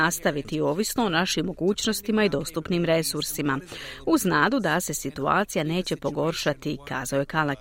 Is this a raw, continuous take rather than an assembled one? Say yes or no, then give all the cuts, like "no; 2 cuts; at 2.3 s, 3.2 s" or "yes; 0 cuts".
yes; 0 cuts